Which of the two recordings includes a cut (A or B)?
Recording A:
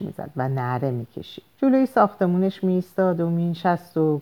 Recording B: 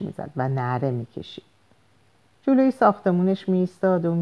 A